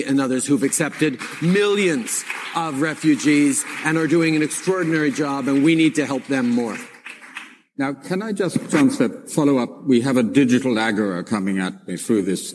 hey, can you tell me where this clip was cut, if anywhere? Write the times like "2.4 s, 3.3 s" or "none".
none